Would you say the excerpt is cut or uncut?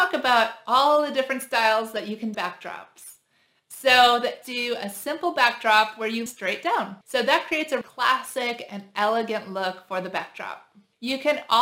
cut